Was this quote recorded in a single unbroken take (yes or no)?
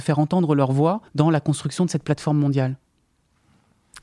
no